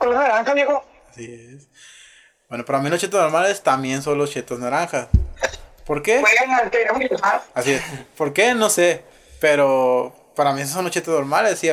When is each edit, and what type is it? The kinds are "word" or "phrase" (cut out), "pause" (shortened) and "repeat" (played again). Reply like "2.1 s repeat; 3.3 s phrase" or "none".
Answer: 7.5 s pause